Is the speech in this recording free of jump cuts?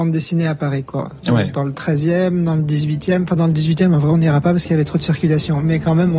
yes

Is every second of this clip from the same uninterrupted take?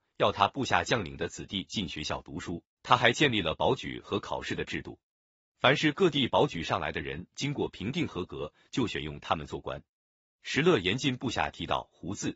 no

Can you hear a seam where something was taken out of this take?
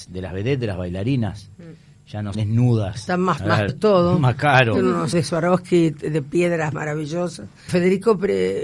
yes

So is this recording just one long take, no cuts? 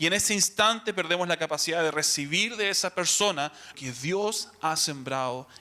no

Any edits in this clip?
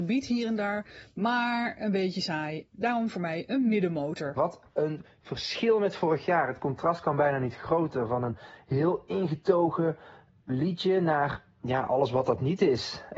no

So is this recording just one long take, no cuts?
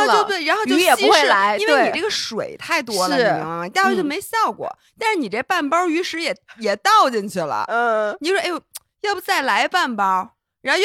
yes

